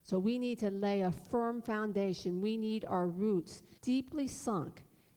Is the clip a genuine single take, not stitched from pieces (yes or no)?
no